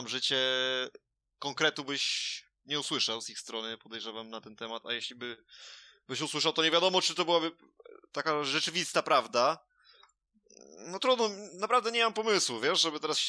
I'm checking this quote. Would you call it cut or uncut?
uncut